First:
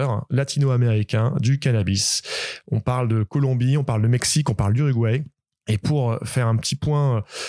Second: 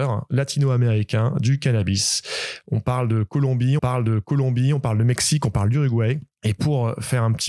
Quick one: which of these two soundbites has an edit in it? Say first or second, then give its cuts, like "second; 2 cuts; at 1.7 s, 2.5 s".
second; 2 cuts; at 3.8 s, 6.3 s